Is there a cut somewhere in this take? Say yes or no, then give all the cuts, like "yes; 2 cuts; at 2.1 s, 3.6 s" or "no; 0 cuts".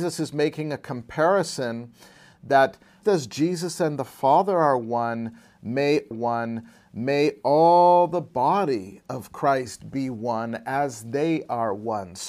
yes; 2 cuts; at 3.0 s, 6.1 s